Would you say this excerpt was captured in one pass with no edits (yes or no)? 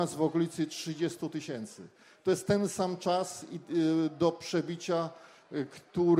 yes